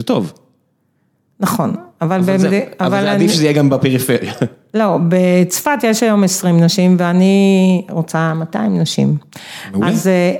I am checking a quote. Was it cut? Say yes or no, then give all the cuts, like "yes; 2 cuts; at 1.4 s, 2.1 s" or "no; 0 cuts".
no; 0 cuts